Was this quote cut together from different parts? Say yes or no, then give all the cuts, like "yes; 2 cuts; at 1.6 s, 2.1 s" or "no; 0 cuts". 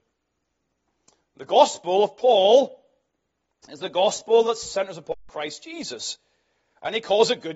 no; 0 cuts